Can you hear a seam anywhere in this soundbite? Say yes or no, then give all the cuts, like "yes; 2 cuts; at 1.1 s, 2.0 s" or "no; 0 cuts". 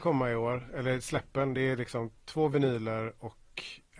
no; 0 cuts